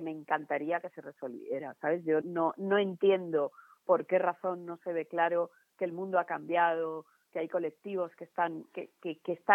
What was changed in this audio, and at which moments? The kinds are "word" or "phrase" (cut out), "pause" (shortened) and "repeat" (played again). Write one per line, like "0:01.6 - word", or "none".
0:02.2 - word